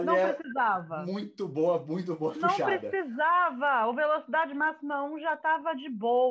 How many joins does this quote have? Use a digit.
0